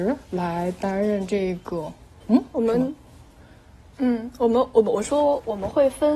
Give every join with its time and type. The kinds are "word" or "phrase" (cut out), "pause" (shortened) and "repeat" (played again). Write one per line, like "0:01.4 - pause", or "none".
none